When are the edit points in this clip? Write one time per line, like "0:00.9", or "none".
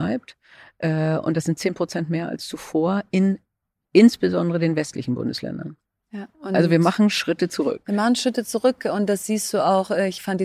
0:06.3